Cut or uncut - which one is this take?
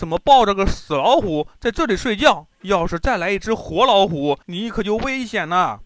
cut